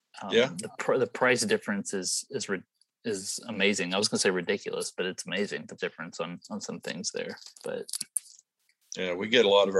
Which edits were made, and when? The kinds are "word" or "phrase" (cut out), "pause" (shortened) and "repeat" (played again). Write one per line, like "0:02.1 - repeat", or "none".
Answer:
0:05.8 - word
0:07.6 - pause

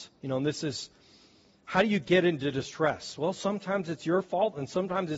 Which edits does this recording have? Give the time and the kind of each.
none

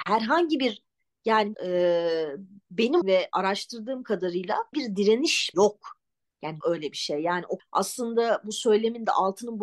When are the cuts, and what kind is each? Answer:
0:01.5 - word
0:03.0 - word
0:04.7 - word
0:05.5 - word
0:06.6 - word
0:07.6 - word

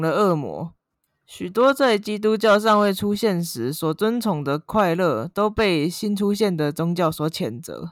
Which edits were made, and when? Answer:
0:01.1 - pause

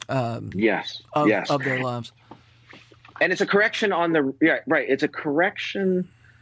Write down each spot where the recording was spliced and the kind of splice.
none

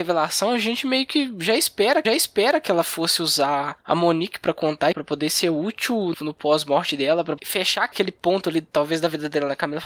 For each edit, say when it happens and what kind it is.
0:02.0 - repeat
0:04.9 - word
0:06.1 - word
0:07.4 - word

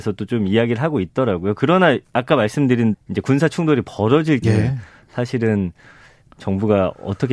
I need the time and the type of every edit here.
0:02.9 - word
0:04.4 - word

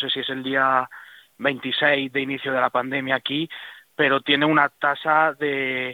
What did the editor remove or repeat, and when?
none

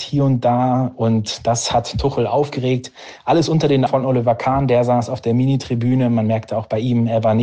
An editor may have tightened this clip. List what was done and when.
0:03.9 - word

